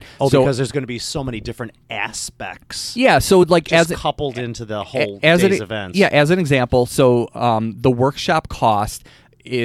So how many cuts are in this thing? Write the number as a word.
zero